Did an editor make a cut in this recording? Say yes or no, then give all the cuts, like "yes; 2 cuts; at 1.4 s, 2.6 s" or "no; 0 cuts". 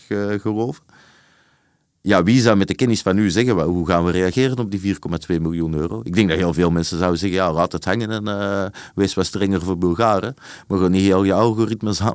no; 0 cuts